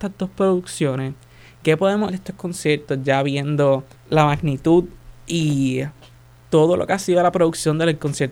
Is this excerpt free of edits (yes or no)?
no